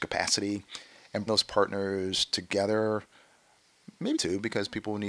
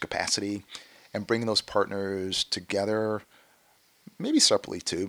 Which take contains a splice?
first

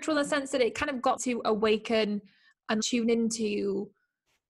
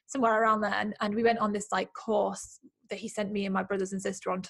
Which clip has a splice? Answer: first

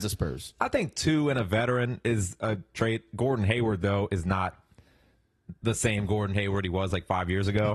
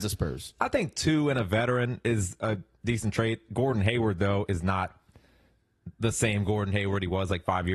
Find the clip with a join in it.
first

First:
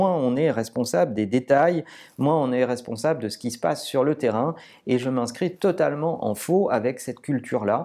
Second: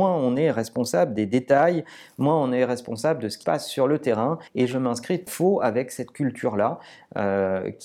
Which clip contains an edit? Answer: second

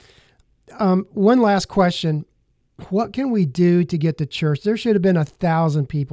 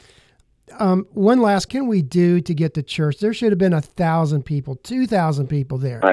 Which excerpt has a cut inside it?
second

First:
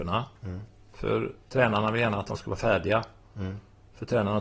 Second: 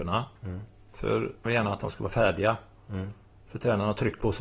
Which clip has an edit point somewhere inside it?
second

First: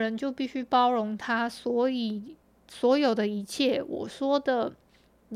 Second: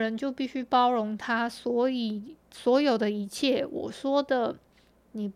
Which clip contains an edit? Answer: second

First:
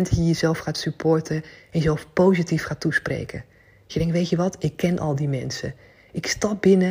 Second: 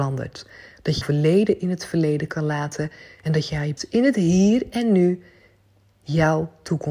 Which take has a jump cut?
second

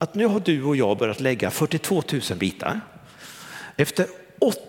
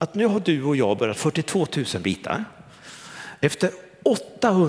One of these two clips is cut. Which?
second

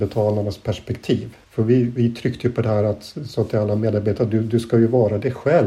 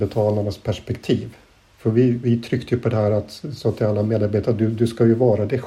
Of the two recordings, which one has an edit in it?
first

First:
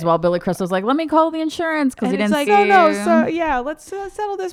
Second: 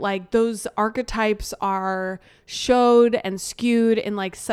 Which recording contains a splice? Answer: first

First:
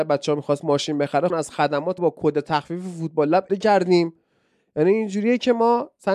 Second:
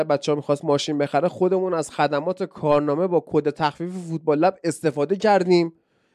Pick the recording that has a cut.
first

